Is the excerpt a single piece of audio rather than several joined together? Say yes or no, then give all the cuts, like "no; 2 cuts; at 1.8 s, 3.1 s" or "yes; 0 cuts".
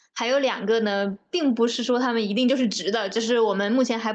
yes; 0 cuts